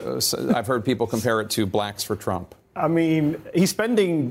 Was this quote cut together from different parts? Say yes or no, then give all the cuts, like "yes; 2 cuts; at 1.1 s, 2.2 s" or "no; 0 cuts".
no; 0 cuts